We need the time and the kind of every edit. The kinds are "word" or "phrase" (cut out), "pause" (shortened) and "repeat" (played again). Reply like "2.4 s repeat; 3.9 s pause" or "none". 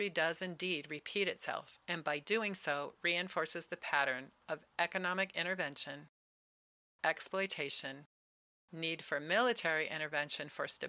none